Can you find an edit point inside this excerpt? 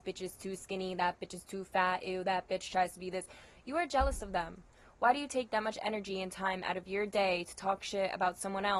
no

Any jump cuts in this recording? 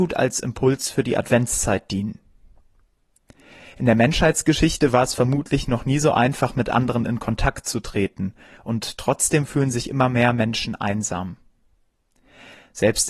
no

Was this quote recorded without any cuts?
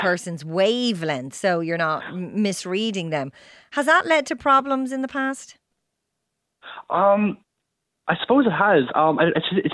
yes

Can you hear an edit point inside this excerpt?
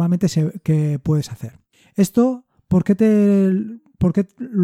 no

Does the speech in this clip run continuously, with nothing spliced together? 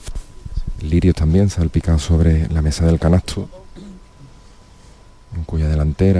yes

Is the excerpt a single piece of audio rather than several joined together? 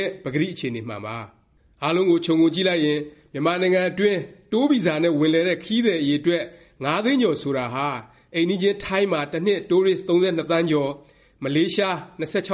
yes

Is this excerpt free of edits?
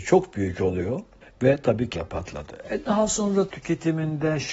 no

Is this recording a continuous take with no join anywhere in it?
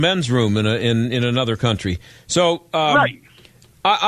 yes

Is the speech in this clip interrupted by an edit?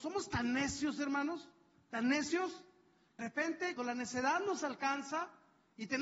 yes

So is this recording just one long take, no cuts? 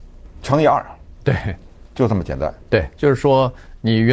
yes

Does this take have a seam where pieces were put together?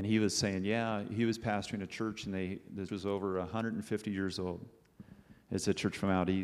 yes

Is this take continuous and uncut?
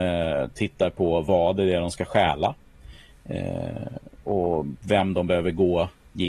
yes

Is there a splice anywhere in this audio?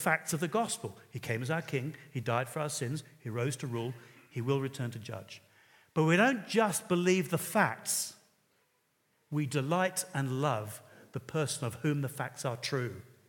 no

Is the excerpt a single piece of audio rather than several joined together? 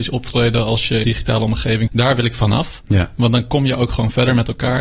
no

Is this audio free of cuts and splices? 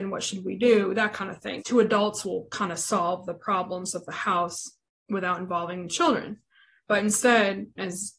no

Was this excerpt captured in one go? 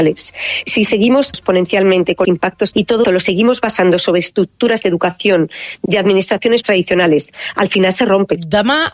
no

